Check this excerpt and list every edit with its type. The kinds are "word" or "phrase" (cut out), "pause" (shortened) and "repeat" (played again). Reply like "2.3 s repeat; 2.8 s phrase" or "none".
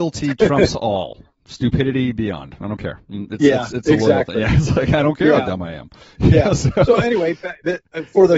none